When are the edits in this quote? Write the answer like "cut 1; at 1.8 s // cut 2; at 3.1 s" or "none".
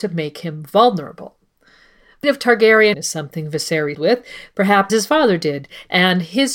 cut 1; at 2.2 s // cut 2; at 2.9 s // cut 3; at 3.9 s // cut 4; at 4.9 s

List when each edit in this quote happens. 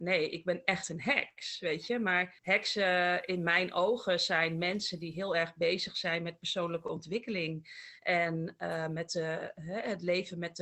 cut 1; at 2.4 s

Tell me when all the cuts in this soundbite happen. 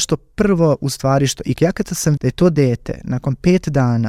cut 1; at 2.2 s

